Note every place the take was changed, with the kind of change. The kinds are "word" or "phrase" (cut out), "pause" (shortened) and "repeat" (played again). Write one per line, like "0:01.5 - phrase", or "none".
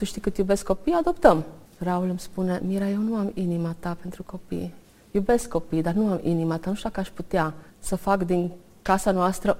0:01.7 - pause
0:04.8 - pause
0:07.7 - pause